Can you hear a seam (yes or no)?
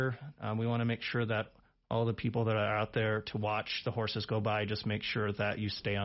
no